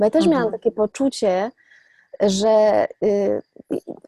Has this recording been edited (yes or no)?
no